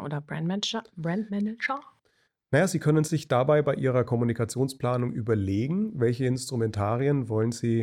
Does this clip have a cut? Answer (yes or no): no